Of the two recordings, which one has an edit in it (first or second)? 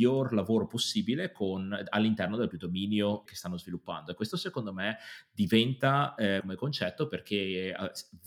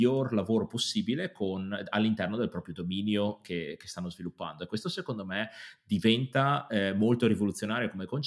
first